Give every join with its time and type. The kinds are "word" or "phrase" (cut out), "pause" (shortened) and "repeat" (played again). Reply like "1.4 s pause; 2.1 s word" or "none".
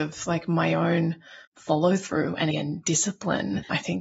1.4 s pause; 2.5 s word